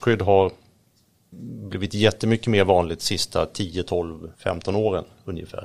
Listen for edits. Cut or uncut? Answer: cut